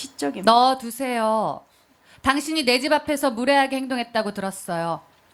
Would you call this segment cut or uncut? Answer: uncut